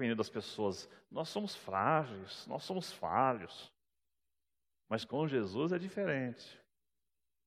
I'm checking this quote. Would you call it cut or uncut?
uncut